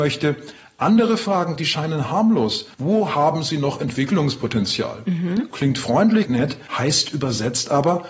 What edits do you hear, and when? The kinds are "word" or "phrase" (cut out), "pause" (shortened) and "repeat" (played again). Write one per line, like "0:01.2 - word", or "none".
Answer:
0:02.7 - pause
0:06.3 - word
0:06.7 - pause